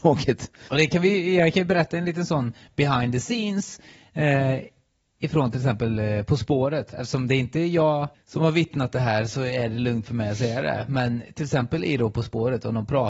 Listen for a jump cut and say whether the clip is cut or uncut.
uncut